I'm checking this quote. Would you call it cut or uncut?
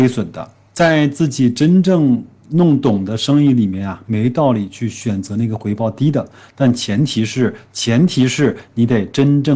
uncut